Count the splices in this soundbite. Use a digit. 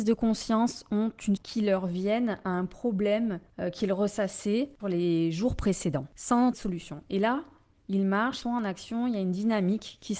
3